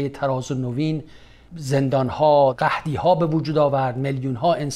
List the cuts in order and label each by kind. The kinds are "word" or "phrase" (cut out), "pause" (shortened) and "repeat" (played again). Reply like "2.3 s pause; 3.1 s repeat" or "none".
none